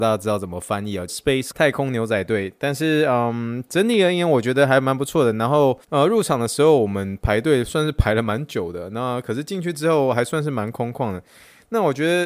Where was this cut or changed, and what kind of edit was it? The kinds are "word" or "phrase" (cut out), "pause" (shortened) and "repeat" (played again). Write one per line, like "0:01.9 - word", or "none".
0:01.1 - phrase
0:01.5 - word
0:05.8 - pause